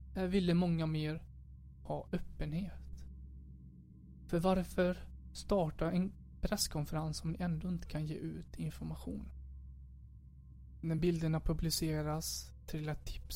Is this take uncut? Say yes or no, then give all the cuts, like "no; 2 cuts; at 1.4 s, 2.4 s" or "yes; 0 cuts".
yes; 0 cuts